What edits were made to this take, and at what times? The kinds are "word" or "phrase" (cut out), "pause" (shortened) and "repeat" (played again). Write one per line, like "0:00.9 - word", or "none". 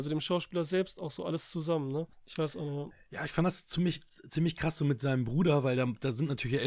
0:02.1 - pause
0:02.9 - word